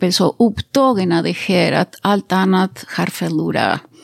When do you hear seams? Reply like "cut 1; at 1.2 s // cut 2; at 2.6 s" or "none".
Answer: none

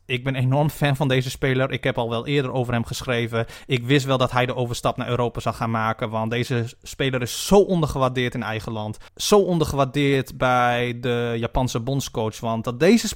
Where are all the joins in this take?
cut 1; at 9.1 s

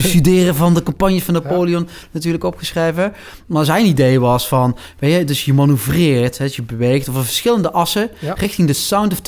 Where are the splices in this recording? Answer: none

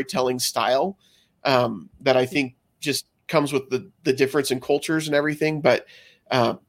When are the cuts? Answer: none

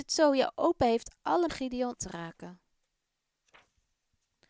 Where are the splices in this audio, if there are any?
cut 1; at 1.5 s // cut 2; at 2.0 s

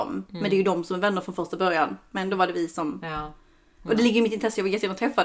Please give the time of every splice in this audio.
none

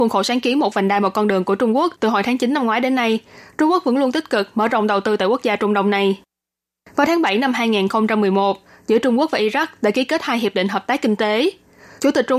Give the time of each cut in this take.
none

